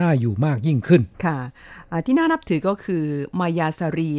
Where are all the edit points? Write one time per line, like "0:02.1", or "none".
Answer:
0:01.1